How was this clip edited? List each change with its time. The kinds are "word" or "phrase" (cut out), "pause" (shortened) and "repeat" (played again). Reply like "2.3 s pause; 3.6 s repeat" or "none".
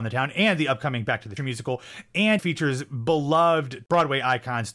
1.4 s word; 2.4 s word